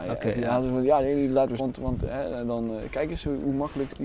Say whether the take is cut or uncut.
cut